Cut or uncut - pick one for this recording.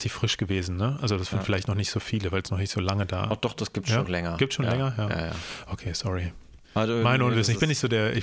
cut